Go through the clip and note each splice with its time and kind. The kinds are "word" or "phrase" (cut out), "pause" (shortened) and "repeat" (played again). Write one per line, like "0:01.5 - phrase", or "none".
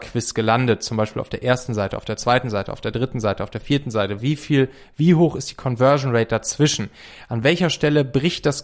none